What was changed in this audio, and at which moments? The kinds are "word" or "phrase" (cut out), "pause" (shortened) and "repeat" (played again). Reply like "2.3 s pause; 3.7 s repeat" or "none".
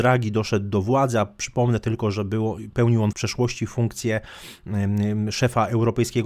3.1 s word